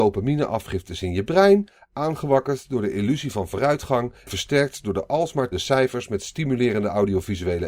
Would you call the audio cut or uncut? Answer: cut